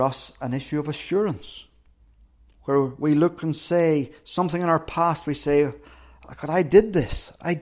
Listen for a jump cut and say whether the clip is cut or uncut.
uncut